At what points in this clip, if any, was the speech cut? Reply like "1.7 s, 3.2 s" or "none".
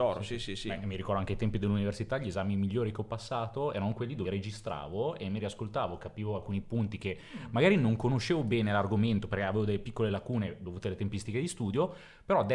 4.2 s